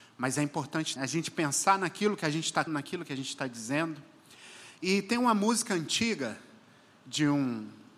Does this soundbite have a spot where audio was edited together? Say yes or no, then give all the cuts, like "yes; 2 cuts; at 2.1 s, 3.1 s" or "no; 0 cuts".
yes; 2 cuts; at 1.0 s, 2.7 s